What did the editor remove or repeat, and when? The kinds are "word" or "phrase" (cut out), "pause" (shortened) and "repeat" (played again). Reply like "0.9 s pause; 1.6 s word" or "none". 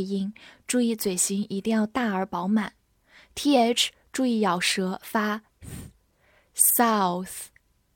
none